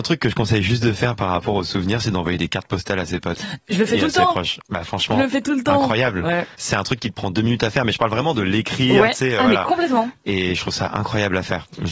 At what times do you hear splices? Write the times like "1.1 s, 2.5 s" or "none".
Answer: 6.5 s